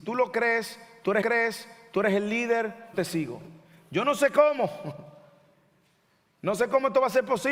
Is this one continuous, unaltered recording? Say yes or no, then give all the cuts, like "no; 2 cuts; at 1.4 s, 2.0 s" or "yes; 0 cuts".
no; 2 cuts; at 1.2 s, 2.9 s